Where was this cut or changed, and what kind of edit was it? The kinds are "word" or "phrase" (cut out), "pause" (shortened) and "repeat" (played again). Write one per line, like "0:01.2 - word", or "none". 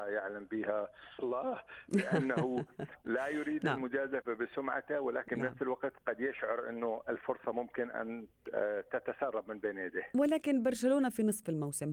0:01.2 - word